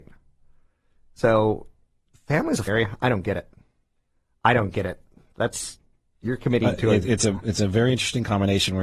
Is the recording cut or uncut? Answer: cut